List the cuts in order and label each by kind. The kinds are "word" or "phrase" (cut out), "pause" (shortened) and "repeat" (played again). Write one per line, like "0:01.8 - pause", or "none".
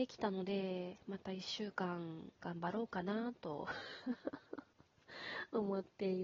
0:02.4 - pause